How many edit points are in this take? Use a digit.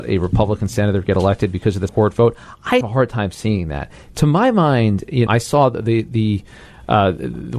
3